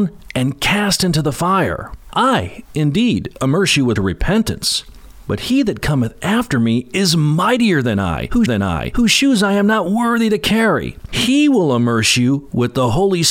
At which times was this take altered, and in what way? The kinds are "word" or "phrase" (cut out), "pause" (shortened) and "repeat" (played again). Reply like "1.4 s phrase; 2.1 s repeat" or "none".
4.0 s phrase; 8.5 s repeat